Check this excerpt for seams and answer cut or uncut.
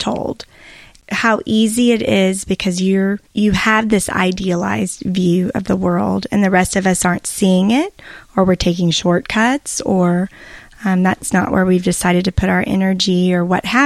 cut